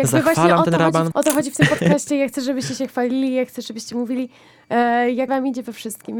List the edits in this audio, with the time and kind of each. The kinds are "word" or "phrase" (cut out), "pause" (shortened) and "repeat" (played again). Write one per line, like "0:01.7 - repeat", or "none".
0:01.1 - word
0:05.3 - word

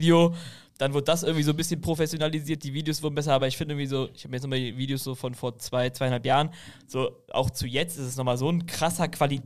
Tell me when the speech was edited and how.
none

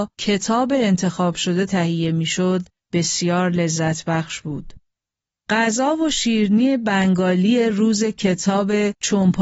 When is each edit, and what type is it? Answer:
none

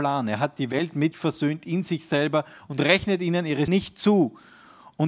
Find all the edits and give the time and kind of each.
0:01.1 - word
0:03.7 - word

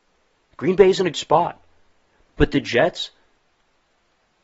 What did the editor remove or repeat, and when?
0:01.1 - word

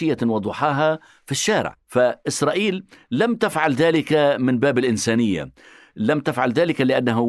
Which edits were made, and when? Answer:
none

